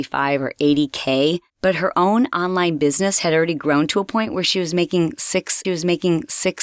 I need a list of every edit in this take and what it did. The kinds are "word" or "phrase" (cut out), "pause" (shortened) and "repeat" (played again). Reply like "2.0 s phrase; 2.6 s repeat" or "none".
1.5 s pause; 5.6 s repeat